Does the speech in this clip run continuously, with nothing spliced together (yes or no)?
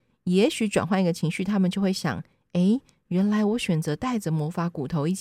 yes